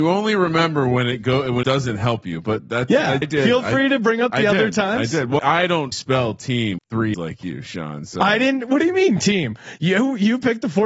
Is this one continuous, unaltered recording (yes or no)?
no